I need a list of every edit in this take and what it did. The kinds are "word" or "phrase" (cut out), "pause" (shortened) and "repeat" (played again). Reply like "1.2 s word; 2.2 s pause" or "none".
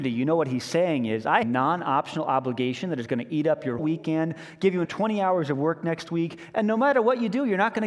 1.4 s phrase; 3.8 s word; 4.8 s word